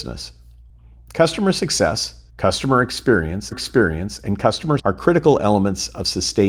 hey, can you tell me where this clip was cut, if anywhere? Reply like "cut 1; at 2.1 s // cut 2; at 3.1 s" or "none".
cut 1; at 2.3 s // cut 2; at 3.5 s // cut 3; at 4.8 s